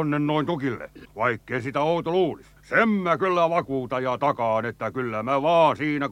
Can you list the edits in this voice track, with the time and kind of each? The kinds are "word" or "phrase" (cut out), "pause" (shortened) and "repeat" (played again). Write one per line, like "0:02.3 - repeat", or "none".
0:01.0 - pause
0:02.6 - pause